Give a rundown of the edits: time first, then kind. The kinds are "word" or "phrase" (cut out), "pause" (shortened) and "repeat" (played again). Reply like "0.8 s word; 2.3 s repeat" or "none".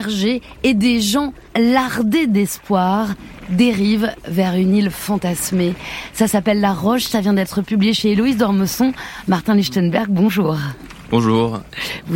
1.5 s pause